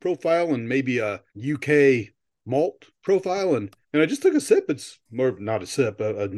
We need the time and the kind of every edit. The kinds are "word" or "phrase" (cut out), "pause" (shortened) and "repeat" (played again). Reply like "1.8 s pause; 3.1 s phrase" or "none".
1.3 s pause; 2.9 s pause; 3.8 s pause